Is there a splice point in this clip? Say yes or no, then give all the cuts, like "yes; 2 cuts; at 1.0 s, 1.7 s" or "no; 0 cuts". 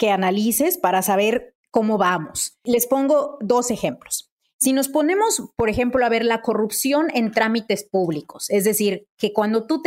no; 0 cuts